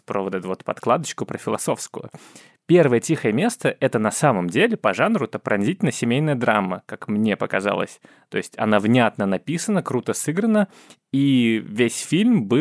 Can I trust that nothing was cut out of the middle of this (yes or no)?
yes